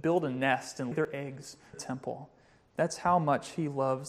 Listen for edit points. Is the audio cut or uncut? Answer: cut